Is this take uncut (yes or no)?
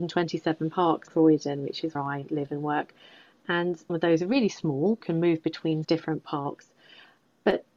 no